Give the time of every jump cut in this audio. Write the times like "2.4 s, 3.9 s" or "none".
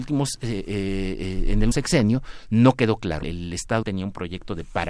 1.7 s, 3.2 s, 3.8 s